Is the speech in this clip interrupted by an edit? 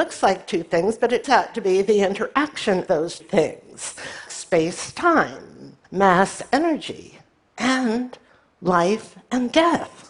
yes; 6 cuts; at 1.2 s, 2.9 s, 3.2 s, 4.3 s, 5.8 s, 8.3 s

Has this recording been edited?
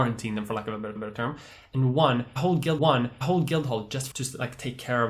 yes; 3 cuts; at 1.0 s, 2.8 s, 4.1 s

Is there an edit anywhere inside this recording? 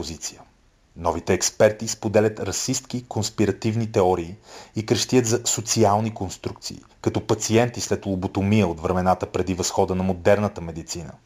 yes; 1 cut; at 6.9 s

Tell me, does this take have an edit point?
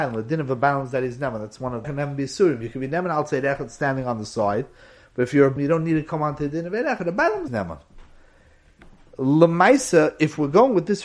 yes; 3 cuts; at 1.8 s, 5.6 s, 7.5 s

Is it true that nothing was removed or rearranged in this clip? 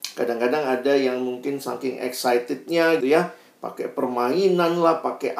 no; 1 cut; at 3.0 s

